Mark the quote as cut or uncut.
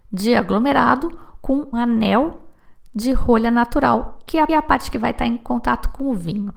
cut